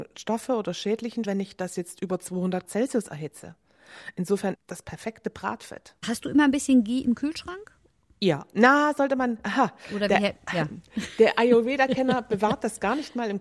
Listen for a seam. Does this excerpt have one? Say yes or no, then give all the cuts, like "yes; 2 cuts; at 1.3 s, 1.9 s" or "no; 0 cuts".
yes; 3 cuts; at 1.2 s, 2.6 s, 4.5 s